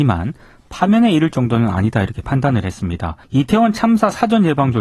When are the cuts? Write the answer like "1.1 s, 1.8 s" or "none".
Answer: 3.2 s